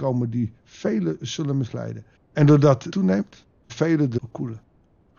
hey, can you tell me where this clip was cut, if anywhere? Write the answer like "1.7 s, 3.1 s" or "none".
2.2 s, 2.9 s, 3.7 s, 4.2 s